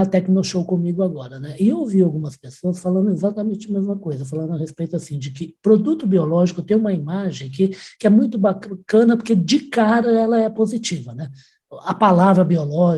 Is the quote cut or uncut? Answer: uncut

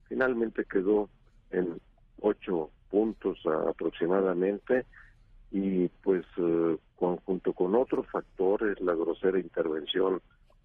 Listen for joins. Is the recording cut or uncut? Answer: uncut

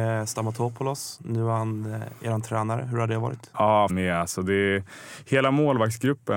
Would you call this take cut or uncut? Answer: cut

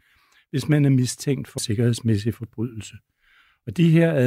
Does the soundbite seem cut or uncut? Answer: cut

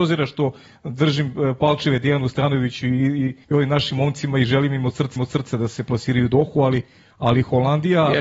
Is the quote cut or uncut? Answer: cut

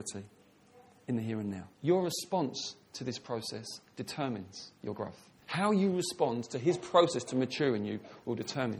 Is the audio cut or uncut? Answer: cut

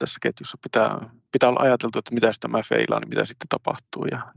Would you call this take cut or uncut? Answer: uncut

